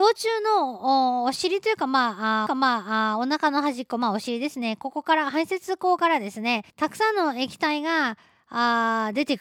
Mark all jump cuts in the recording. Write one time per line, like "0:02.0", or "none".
0:02.5
0:06.7